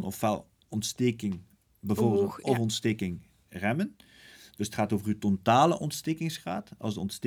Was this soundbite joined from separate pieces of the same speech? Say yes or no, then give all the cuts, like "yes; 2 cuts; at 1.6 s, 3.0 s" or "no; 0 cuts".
no; 0 cuts